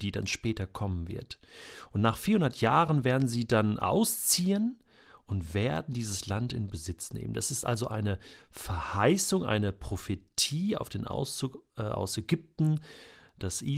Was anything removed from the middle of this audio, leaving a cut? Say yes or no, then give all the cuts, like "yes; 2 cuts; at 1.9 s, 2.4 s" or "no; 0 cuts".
no; 0 cuts